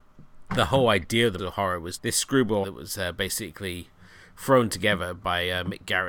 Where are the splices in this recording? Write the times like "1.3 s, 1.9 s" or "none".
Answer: 1.4 s, 2.0 s, 2.6 s